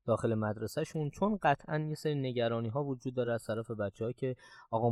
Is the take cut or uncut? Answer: uncut